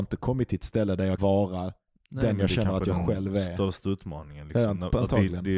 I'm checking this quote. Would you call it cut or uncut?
cut